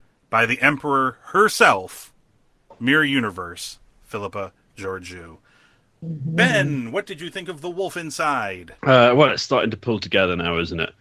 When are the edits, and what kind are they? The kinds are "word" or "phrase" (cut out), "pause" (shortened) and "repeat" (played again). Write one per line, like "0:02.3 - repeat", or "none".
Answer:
0:08.8 - pause